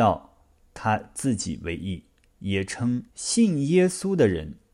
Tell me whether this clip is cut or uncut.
cut